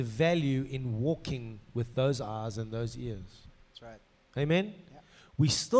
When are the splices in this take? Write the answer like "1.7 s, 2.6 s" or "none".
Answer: none